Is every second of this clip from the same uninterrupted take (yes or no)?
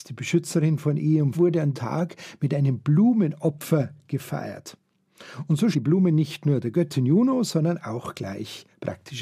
no